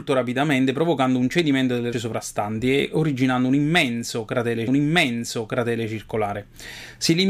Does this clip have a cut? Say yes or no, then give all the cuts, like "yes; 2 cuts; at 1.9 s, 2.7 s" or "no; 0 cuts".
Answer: yes; 2 cuts; at 1.9 s, 4.7 s